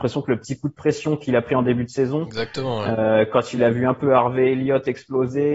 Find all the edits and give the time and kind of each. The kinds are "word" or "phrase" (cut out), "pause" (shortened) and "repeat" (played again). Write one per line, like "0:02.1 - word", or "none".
none

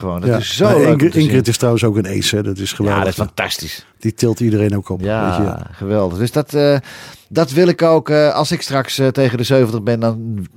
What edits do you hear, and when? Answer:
none

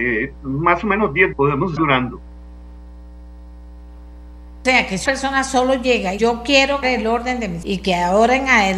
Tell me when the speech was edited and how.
0:01.3 - word
0:01.8 - word
0:05.1 - word
0:06.2 - word
0:06.8 - word
0:07.6 - word

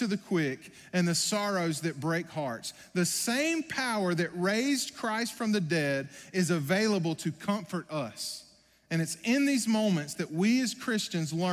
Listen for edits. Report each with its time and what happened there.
none

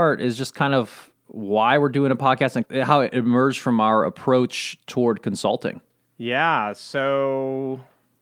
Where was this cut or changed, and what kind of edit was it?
0:02.6 - word
0:06.1 - pause

